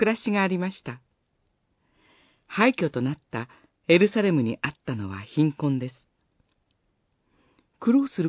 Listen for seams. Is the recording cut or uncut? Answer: cut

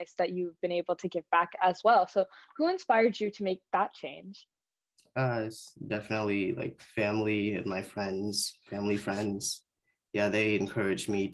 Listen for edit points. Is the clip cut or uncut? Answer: uncut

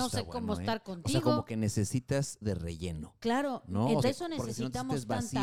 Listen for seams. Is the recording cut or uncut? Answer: cut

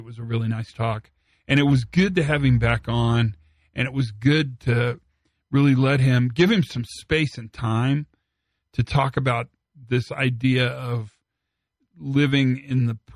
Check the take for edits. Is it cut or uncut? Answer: uncut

